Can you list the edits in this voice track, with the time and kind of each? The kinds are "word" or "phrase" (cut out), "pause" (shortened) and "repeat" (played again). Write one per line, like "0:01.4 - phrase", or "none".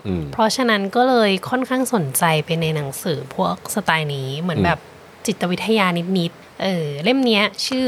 none